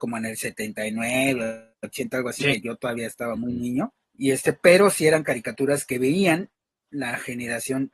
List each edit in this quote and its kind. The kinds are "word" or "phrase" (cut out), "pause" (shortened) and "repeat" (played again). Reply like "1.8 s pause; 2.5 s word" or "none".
1.7 s pause; 4.0 s pause